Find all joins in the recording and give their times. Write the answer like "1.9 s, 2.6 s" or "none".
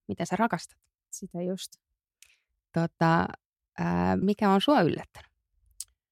4.2 s